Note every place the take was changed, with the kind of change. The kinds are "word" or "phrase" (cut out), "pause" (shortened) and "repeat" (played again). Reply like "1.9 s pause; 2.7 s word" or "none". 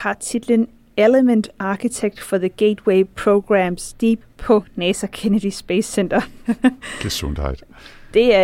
4.2 s phrase

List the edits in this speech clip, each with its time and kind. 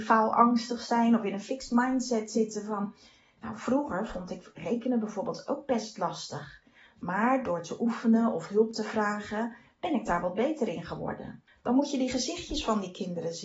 11.5 s pause

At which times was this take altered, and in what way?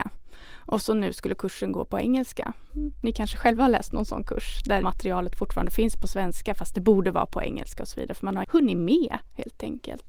4.8 s phrase; 8.4 s word

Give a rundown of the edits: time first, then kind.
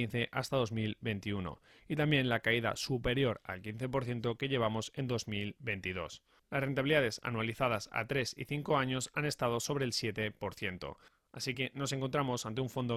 none

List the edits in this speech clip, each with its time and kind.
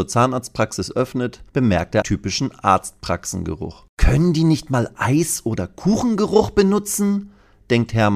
1.5 s pause; 2.0 s phrase

